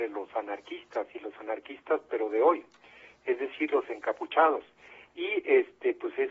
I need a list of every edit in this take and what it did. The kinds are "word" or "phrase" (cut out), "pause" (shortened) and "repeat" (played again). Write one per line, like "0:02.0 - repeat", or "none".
none